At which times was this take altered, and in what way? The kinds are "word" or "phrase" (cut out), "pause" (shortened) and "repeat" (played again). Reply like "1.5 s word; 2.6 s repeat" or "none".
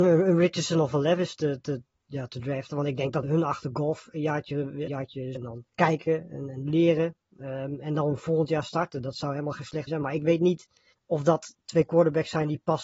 1.4 s word; 3.2 s phrase; 4.9 s word; 5.3 s word; 5.7 s pause; 9.9 s word; 10.9 s pause